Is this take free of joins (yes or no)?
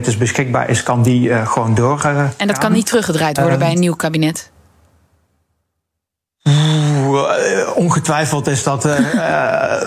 yes